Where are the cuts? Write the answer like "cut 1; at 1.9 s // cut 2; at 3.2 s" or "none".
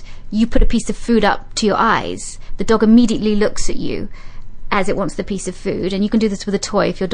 none